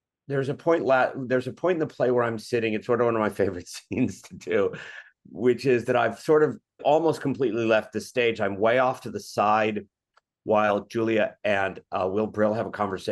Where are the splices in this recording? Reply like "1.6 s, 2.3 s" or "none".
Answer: 6.8 s